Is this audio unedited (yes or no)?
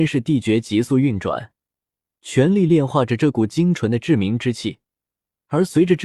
yes